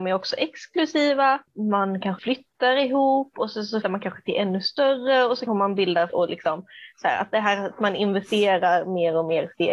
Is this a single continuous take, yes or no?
no